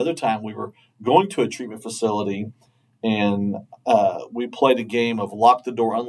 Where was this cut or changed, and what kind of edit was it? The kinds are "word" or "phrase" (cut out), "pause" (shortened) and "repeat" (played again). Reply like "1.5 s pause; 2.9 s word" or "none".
none

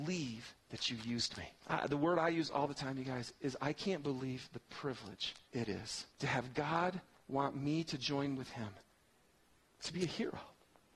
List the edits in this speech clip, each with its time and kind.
1.6 s pause; 5.5 s pause; 6.1 s pause

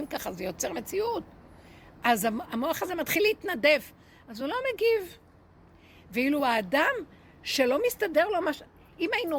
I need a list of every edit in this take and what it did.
none

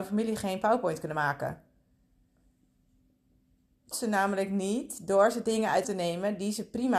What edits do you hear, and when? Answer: 3.9 s word; 5.8 s word

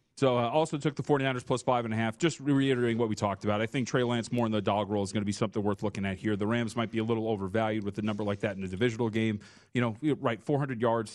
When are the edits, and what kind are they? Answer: none

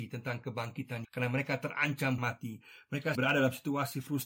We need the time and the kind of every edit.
1.0 s word; 2.2 s word; 3.1 s word

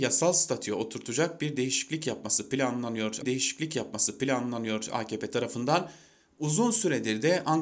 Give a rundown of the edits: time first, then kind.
3.2 s repeat

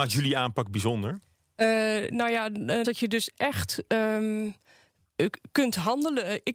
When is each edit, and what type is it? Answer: 2.8 s word

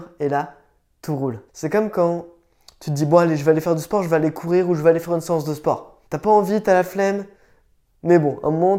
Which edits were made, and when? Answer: 1.5 s pause; 6.1 s pause

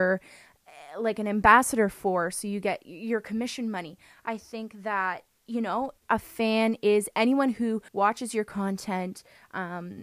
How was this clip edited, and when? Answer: 6.0 s pause; 7.9 s pause

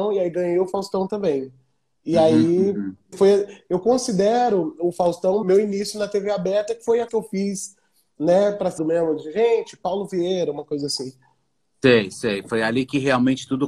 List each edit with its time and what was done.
3.1 s word; 5.4 s word; 7.1 s word; 8.8 s word

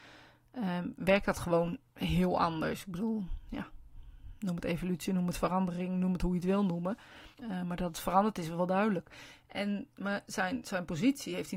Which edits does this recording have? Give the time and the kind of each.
7.3 s pause

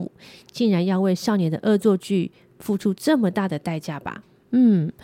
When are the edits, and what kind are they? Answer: none

